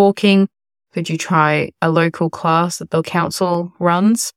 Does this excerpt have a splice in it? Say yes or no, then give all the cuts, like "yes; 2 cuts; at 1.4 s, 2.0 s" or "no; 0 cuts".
no; 0 cuts